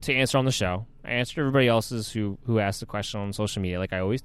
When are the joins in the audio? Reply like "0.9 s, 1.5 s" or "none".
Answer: none